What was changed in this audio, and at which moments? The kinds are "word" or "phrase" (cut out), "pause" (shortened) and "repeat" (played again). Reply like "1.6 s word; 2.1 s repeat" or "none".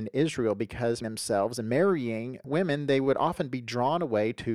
1.0 s phrase; 2.4 s word